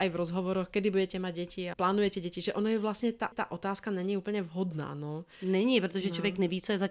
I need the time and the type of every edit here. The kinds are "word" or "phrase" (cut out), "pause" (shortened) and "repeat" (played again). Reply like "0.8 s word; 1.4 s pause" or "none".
1.7 s word; 3.3 s repeat